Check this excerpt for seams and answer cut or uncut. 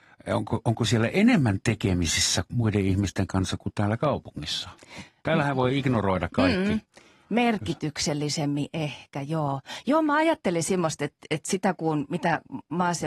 uncut